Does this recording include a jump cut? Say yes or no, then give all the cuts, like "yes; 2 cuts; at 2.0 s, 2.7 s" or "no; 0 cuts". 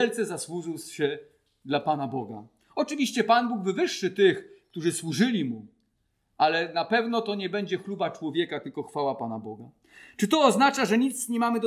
no; 0 cuts